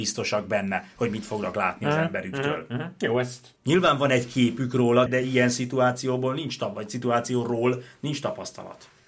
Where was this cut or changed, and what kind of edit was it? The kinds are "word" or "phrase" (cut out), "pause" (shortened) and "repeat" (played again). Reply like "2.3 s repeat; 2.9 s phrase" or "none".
3.6 s pause; 5.1 s word